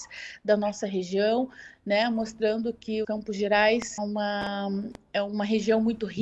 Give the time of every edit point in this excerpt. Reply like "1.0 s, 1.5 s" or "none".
3.0 s, 4.0 s

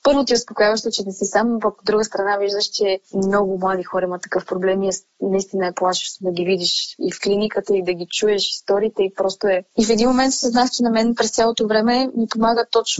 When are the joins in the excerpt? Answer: 3.0 s, 9.7 s

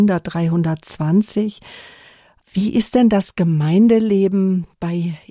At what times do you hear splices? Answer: none

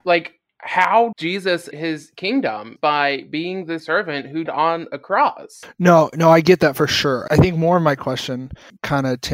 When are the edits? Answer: 1.1 s, 1.7 s, 2.8 s, 3.8 s, 4.5 s, 7.3 s

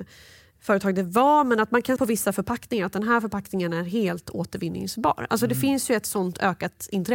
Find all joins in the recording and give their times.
2.0 s

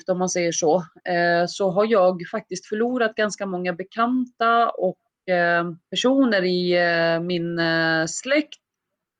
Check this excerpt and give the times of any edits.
5.8 s

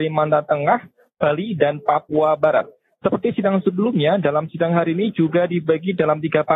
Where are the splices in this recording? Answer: none

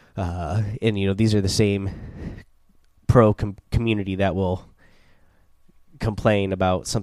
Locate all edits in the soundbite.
none

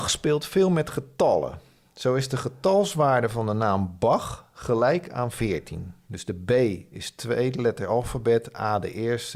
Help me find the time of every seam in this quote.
none

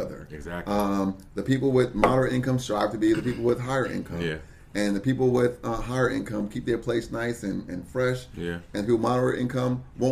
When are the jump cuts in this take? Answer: none

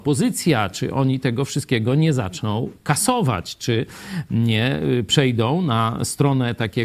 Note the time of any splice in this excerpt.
none

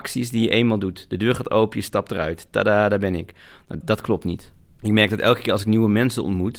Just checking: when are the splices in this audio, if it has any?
3.8 s

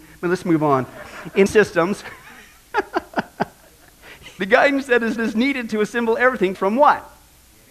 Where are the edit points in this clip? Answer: 1.5 s, 4.4 s, 5.2 s, 6.5 s

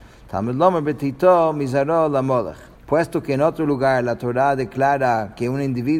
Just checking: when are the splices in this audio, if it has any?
2.8 s

